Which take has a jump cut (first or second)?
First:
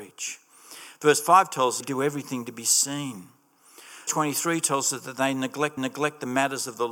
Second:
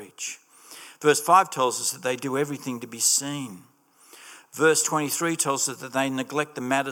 first